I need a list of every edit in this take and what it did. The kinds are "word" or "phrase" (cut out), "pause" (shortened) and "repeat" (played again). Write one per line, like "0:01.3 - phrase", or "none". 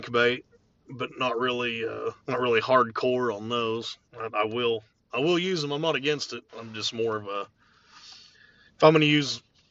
0:02.2 - pause
0:04.1 - pause
0:06.5 - pause